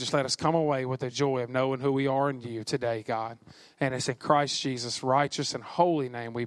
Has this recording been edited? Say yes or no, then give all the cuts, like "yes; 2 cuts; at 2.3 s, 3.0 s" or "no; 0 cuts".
no; 0 cuts